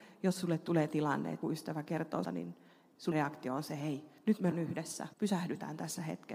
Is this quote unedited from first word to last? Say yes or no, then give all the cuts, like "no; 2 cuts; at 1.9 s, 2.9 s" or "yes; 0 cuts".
no; 7 cuts; at 0.9 s, 1.4 s, 2.2 s, 3.1 s, 4.2 s, 4.5 s, 5.1 s